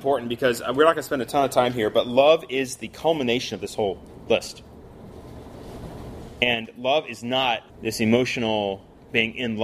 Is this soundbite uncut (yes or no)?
no